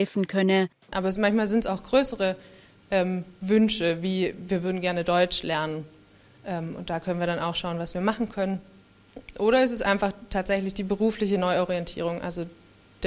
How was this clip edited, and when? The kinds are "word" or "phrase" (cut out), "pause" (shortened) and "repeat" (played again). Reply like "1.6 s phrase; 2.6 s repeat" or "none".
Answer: none

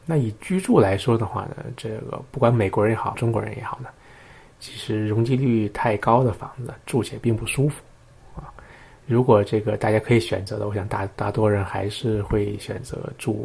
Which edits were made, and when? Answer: 3.1 s phrase

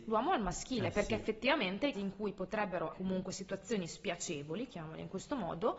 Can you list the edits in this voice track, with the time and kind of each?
1.9 s word; 2.9 s word

